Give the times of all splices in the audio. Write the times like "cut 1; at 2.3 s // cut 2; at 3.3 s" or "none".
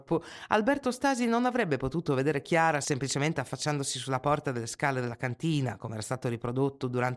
none